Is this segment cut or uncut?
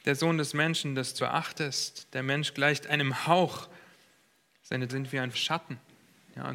cut